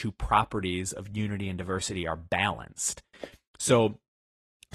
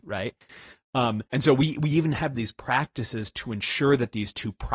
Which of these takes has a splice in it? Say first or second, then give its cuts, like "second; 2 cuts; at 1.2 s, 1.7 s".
second; 1 cut; at 1.3 s